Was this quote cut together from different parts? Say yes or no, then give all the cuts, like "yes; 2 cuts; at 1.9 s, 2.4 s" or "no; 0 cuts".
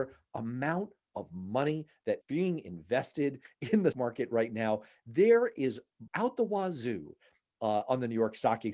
yes; 3 cuts; at 2.2 s, 3.9 s, 6.1 s